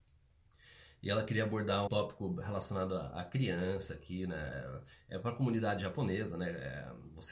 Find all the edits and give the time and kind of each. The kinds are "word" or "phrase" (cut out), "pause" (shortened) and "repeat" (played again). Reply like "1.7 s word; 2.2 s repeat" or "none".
1.9 s word